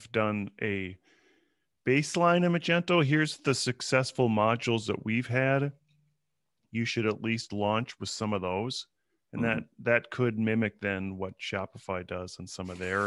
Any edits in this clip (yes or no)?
no